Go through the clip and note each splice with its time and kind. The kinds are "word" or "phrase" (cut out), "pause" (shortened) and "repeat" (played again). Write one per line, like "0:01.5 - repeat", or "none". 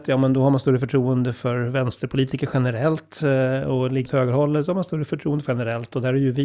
0:04.0 - word
0:05.5 - word